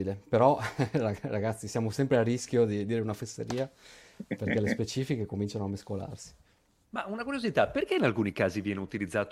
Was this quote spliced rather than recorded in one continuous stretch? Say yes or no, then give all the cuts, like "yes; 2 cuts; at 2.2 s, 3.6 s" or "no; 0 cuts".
no; 0 cuts